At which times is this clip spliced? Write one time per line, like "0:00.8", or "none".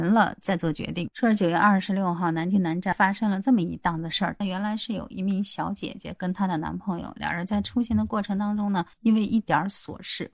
0:08.9